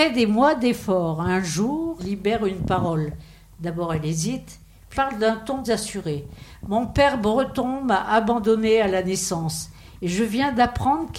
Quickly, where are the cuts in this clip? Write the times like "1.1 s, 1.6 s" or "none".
2.0 s, 4.9 s, 5.6 s